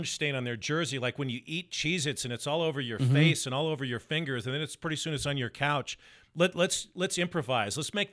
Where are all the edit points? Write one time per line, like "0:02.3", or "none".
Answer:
none